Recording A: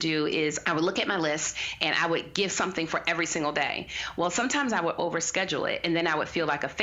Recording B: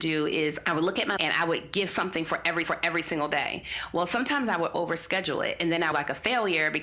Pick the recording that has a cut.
B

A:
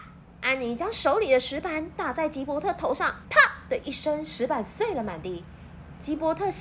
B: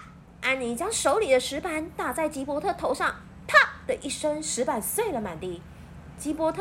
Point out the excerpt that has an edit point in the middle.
A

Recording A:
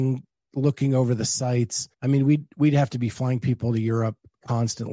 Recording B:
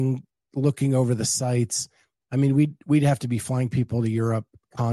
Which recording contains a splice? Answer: A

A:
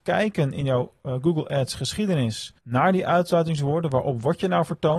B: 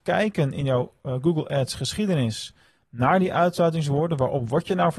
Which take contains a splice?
A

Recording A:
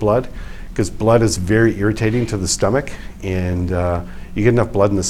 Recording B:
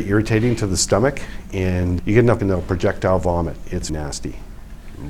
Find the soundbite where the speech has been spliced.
B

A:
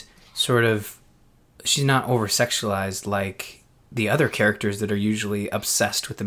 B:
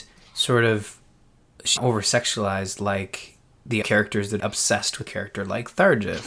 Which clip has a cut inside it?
B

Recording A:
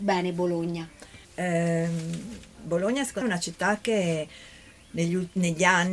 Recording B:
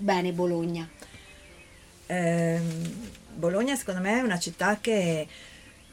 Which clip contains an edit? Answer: A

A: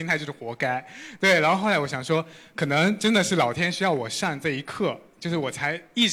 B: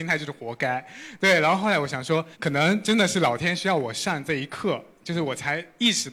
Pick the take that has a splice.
B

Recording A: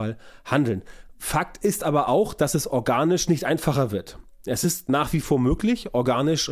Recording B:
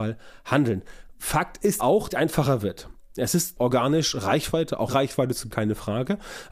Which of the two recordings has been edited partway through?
B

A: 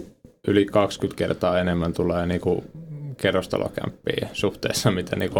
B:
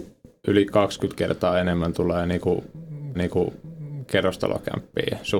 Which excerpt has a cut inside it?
B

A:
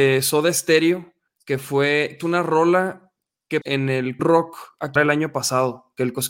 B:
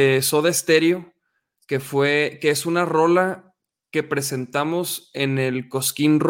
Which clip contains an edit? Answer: A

